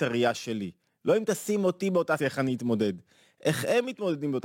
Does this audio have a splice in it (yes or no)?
yes